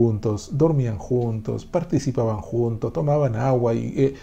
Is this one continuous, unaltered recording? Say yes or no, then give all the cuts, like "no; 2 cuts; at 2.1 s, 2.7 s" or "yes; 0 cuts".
yes; 0 cuts